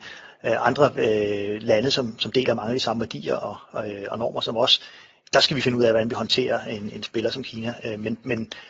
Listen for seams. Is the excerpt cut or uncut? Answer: uncut